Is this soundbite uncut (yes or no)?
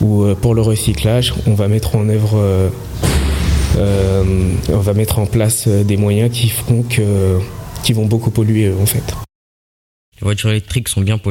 yes